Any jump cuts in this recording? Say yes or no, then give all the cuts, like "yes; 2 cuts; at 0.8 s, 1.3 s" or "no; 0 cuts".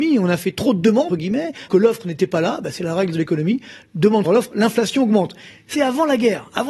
yes; 5 cuts; at 1.1 s, 1.7 s, 3.1 s, 4.2 s, 5.7 s